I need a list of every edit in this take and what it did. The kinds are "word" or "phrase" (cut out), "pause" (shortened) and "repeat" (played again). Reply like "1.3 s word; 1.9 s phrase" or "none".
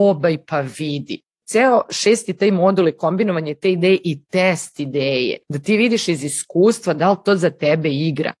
5.4 s pause